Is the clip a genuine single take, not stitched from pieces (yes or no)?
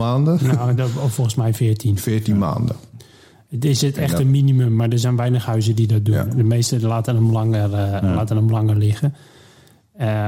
yes